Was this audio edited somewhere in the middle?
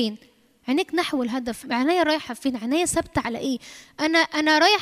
yes; 1 cut; at 1.6 s

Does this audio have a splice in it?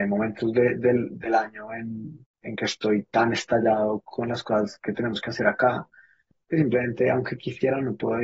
no; 0 cuts

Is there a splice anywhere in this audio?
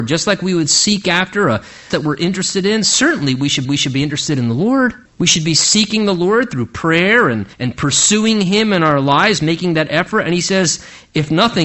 yes; 4 cuts; at 1.9 s, 3.6 s, 5.1 s, 7.5 s

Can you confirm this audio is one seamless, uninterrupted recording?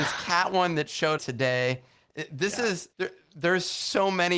no; 2 cuts; at 1.2 s, 2.9 s

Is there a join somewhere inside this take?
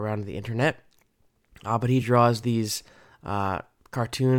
no; 0 cuts

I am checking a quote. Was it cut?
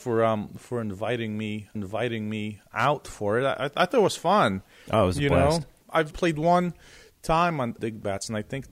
yes; 2 cuts; at 1.8 s, 6.1 s

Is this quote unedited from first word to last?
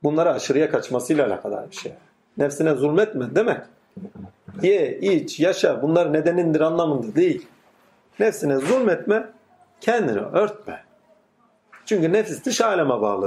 yes; 0 cuts

